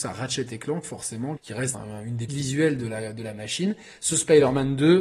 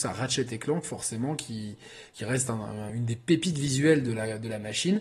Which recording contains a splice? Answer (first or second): first